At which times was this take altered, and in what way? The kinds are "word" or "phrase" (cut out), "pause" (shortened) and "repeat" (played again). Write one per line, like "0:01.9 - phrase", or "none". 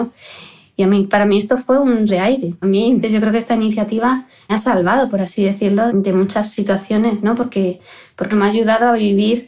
0:02.1 - word
0:02.6 - word
0:03.0 - word
0:04.5 - word
0:05.9 - word
0:08.3 - word